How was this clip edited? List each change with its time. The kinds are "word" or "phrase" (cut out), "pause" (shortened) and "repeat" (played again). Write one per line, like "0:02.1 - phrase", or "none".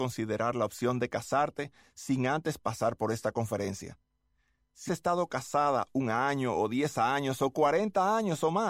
0:04.9 - word